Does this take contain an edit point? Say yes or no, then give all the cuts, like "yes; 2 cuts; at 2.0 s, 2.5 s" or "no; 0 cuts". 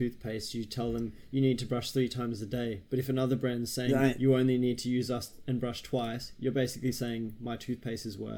no; 0 cuts